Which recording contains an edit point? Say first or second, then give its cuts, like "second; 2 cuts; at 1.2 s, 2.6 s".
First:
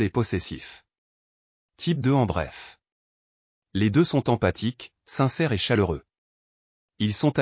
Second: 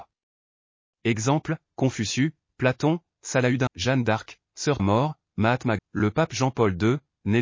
second; 3 cuts; at 3.7 s, 4.8 s, 5.8 s